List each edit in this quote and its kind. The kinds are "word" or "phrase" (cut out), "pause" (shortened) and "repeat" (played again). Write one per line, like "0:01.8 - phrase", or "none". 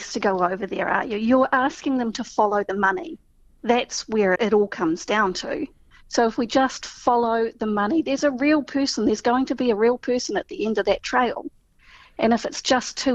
0:04.4 - word